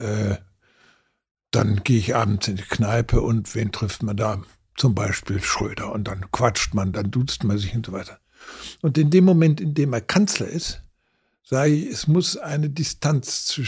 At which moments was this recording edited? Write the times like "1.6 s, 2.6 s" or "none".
none

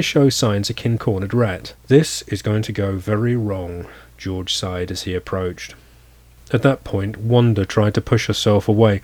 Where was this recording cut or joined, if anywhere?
1.0 s, 1.8 s

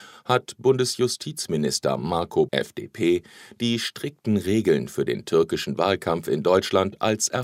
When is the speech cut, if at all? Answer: 2.5 s

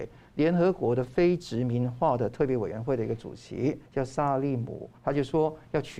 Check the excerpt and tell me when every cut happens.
3.9 s, 5.0 s

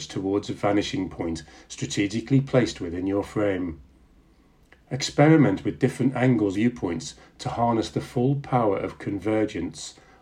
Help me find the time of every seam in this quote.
6.5 s

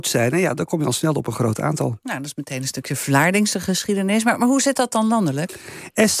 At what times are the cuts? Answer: none

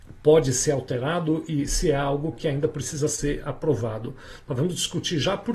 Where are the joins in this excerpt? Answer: none

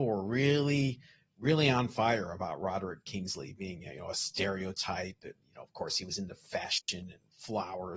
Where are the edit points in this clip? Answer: none

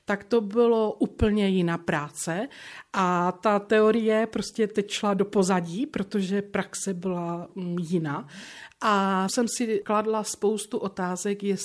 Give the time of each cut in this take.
none

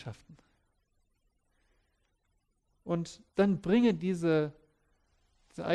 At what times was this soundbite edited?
3.3 s

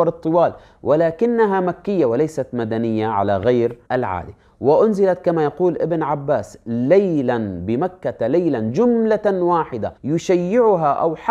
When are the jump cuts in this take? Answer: 3.9 s, 10.0 s

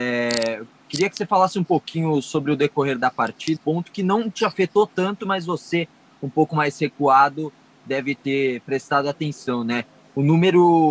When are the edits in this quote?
3.6 s

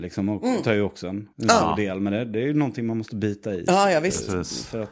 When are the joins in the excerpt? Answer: 1.3 s

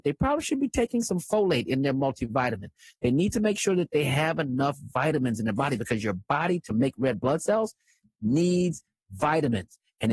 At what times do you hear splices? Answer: none

